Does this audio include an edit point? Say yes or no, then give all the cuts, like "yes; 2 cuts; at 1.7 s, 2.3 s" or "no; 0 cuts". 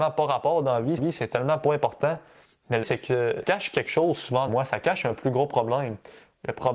yes; 4 cuts; at 1.0 s, 2.8 s, 3.4 s, 4.5 s